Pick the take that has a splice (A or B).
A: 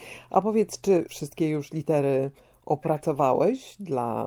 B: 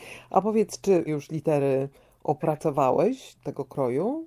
B